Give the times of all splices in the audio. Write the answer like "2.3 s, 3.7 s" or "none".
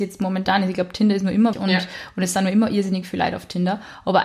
1.5 s